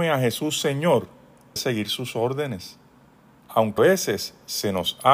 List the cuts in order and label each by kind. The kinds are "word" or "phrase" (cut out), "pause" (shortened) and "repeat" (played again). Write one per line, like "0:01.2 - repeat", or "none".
0:01.6 - word
0:03.8 - word